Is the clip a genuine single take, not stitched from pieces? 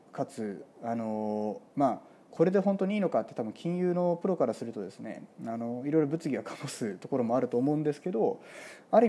no; 1 cut; at 1.7 s

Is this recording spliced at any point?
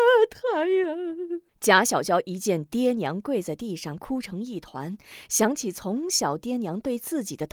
yes; 1 cut; at 1.5 s

